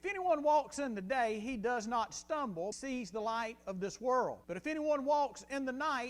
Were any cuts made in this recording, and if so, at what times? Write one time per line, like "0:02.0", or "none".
0:02.7
0:04.4